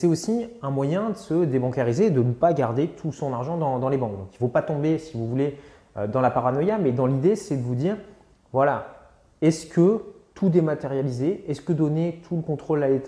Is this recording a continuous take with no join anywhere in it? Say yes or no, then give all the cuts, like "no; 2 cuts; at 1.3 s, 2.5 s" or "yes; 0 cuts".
yes; 0 cuts